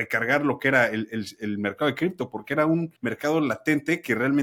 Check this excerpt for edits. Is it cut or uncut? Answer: cut